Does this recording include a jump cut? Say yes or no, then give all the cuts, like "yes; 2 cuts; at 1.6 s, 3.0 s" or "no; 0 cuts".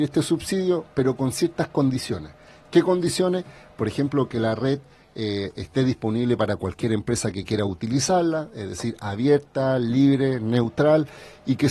no; 0 cuts